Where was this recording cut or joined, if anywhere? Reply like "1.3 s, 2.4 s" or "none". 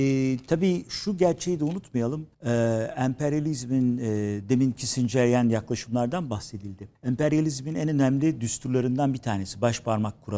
2.3 s, 7.0 s